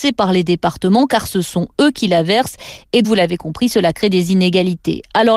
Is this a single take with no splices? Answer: no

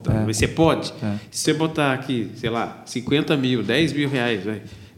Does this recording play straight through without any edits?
no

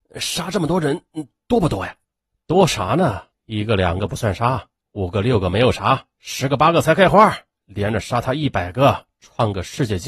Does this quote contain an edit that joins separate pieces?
yes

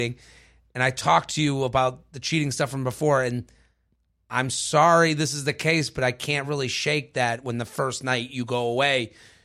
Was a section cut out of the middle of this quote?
no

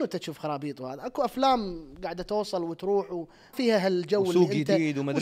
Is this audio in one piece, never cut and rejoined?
no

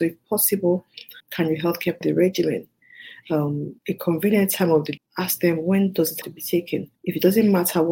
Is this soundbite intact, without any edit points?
no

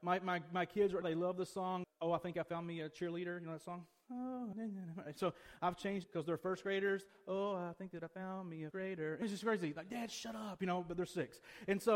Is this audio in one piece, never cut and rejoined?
no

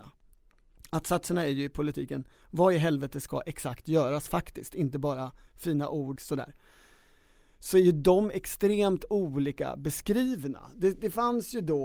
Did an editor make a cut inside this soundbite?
yes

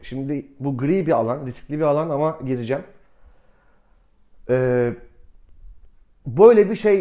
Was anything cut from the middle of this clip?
no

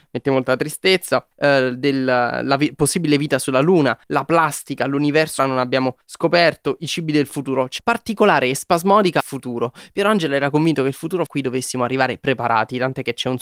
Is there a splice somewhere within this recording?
yes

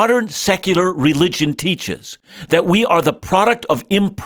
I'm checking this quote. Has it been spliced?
no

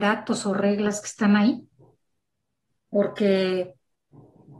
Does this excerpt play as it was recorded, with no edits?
yes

